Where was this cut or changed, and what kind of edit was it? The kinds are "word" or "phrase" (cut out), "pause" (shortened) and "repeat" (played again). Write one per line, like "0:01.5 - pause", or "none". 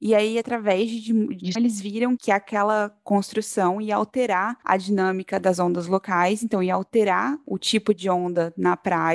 0:01.6 - phrase